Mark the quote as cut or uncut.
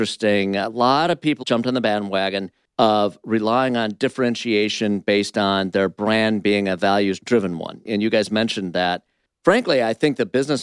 cut